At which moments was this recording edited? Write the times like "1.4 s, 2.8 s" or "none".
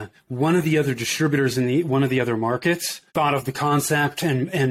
3.1 s